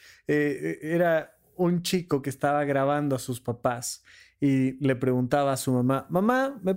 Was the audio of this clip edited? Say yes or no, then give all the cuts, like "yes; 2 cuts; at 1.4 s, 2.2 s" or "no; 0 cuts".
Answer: no; 0 cuts